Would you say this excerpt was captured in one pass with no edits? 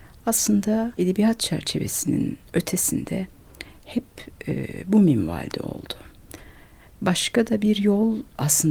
no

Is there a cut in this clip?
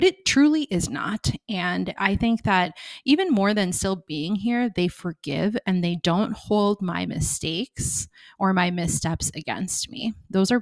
no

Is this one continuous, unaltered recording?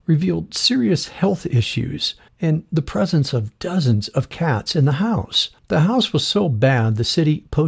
no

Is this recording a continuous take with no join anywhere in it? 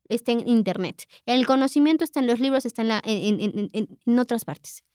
yes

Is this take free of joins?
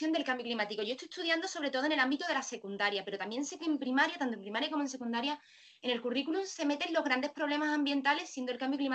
yes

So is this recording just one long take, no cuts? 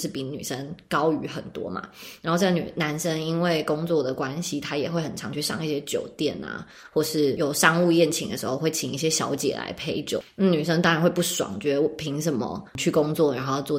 no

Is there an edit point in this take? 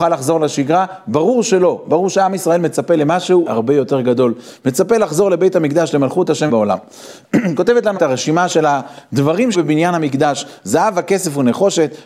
yes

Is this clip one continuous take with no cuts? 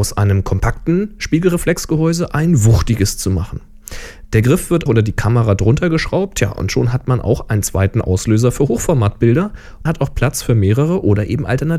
no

